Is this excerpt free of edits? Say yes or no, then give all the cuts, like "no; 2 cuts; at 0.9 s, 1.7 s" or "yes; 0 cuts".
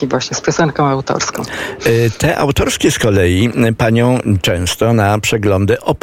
no; 1 cut; at 3.8 s